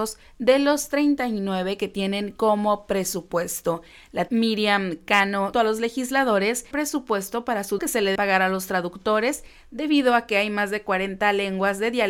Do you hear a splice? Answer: yes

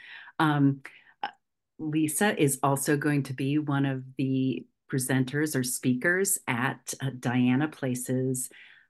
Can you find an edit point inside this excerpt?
no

